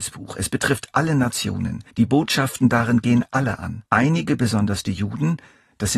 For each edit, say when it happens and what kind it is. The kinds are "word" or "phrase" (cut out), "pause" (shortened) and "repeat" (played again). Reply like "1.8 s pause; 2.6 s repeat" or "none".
1.9 s pause; 3.9 s pause